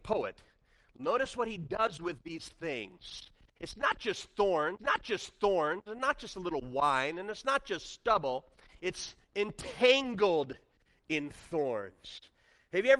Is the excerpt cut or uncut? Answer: cut